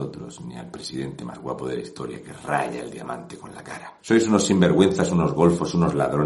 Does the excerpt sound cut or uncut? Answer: cut